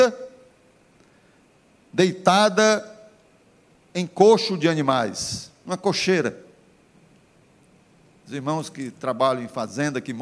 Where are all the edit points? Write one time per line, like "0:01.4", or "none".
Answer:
none